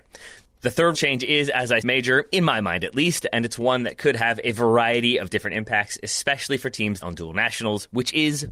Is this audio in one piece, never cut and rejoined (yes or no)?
no